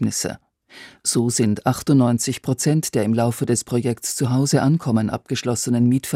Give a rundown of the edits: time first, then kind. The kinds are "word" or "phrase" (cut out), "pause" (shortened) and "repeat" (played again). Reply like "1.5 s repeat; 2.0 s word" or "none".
none